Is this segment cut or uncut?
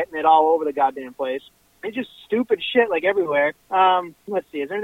cut